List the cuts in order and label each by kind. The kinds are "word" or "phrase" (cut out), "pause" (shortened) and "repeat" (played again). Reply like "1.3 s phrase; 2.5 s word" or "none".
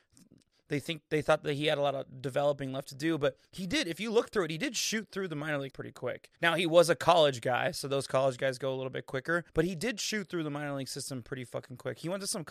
3.5 s pause; 5.7 s word; 6.4 s pause; 9.5 s pause